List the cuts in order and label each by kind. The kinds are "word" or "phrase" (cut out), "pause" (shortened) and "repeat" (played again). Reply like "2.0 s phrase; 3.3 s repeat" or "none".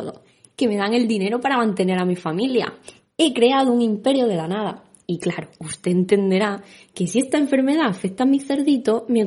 none